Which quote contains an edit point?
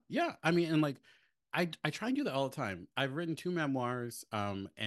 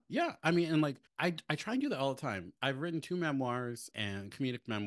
second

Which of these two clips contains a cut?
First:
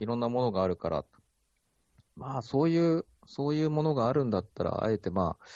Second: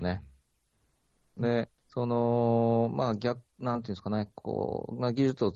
second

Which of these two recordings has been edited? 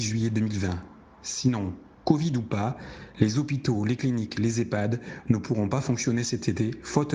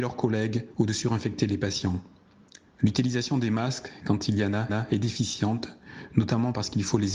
second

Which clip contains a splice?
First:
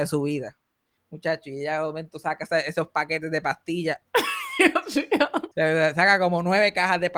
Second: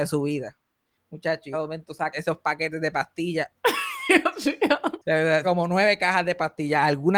second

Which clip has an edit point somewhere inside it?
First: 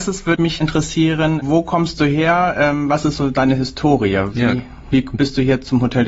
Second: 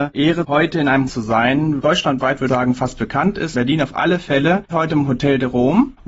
second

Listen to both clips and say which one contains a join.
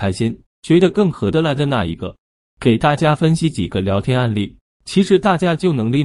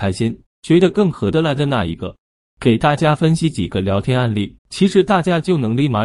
second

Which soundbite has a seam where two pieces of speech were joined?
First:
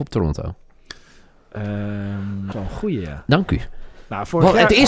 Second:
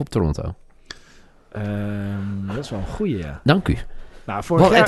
first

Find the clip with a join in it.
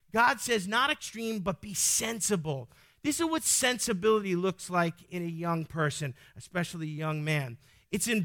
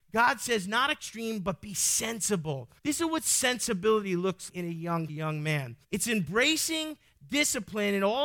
second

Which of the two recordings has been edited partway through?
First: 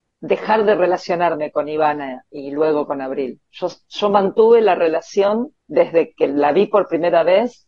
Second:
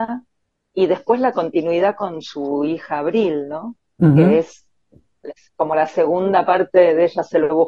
first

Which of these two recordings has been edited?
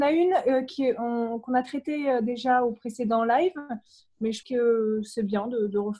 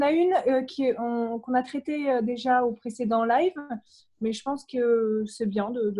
first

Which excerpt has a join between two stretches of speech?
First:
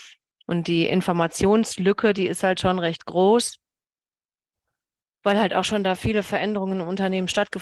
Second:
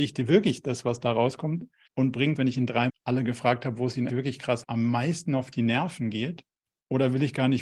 second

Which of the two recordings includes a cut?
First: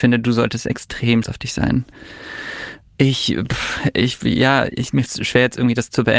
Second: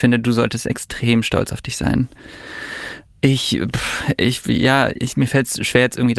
first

